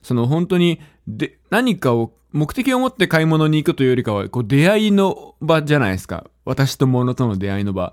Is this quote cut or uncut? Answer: cut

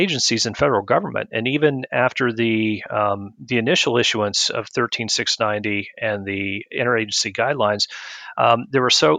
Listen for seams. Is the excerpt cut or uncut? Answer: uncut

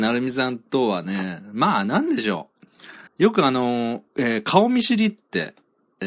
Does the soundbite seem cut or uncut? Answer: cut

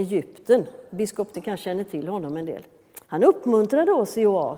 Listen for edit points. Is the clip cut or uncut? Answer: cut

